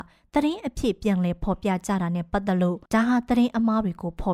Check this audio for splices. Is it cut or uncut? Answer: cut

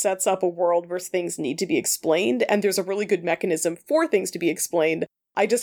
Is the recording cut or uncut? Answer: uncut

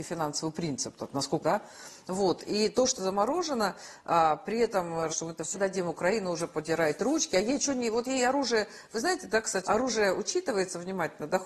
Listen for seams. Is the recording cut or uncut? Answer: cut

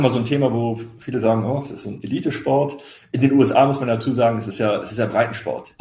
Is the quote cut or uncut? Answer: uncut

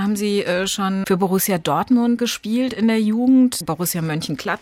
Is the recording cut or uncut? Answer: cut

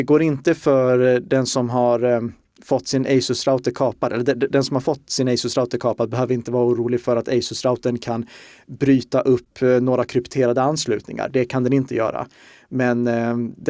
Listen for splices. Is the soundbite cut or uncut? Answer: uncut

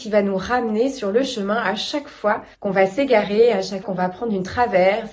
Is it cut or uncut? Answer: cut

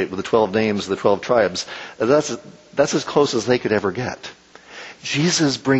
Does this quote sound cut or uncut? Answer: uncut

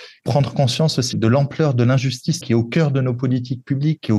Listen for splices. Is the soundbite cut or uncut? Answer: cut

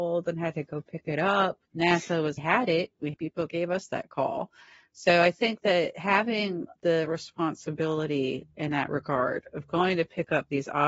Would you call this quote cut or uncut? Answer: cut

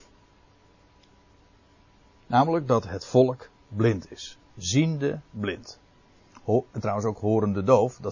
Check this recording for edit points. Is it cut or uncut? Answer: uncut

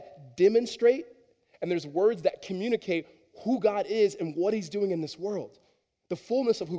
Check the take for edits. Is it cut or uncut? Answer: uncut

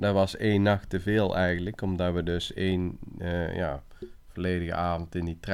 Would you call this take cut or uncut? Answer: uncut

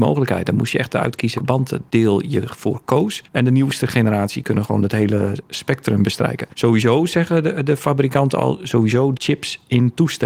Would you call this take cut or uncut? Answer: cut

